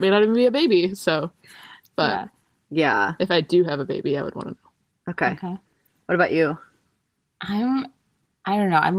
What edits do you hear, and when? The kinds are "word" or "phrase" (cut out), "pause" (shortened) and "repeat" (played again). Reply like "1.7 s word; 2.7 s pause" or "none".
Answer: none